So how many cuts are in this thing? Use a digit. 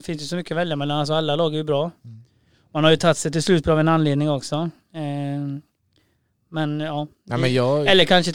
0